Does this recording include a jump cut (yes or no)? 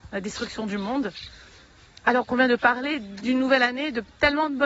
no